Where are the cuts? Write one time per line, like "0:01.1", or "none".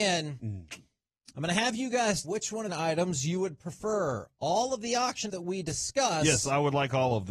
0:02.2
0:02.7
0:05.3